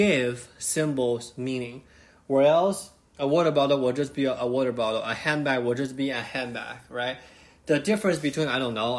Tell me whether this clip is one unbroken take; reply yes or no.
yes